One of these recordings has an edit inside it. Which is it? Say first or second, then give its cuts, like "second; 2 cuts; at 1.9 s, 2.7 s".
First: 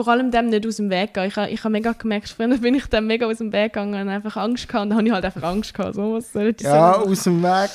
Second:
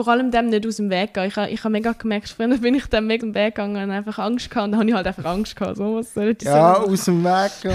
second; 1 cut; at 3.2 s